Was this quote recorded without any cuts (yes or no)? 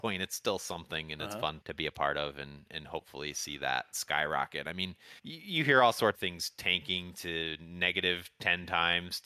no